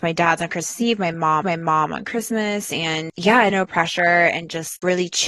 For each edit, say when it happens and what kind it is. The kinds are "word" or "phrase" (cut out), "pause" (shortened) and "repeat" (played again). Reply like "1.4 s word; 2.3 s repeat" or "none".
1.4 s repeat; 3.5 s phrase